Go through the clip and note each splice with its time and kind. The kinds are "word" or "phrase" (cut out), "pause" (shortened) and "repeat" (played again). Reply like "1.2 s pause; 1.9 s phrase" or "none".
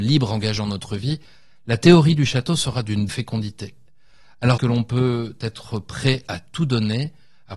3.1 s word; 4.6 s word